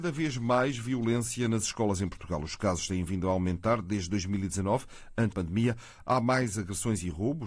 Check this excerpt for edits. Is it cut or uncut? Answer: cut